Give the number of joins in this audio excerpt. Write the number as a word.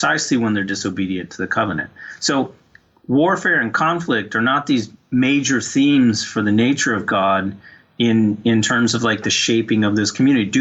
zero